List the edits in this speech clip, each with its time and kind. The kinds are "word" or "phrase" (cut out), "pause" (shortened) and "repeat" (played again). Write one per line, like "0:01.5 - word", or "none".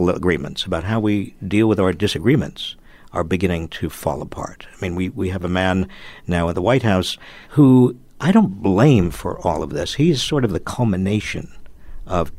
0:07.4 - pause